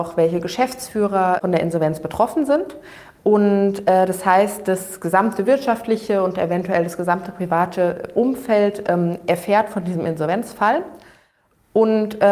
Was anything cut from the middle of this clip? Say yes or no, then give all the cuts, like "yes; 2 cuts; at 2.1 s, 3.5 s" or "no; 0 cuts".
no; 0 cuts